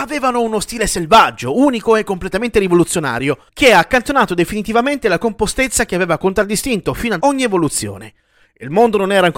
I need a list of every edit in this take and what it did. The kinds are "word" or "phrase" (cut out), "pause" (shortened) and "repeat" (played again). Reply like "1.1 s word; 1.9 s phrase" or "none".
3.5 s pause; 7.2 s word